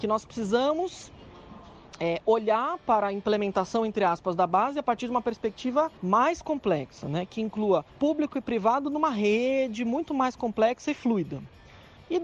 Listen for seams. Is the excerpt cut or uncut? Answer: cut